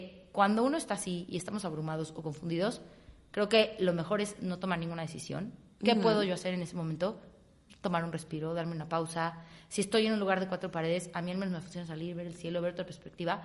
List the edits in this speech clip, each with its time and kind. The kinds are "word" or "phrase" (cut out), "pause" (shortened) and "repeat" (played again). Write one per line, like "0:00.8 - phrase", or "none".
none